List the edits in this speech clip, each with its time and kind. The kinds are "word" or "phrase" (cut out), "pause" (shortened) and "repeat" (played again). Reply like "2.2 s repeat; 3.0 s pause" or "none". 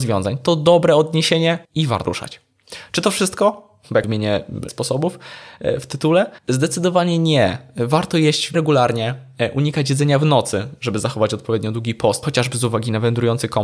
1.6 s pause; 2.0 s word; 4.0 s word; 4.7 s word; 6.4 s pause; 8.5 s word; 12.2 s phrase